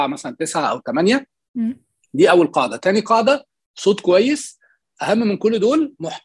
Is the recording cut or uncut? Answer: uncut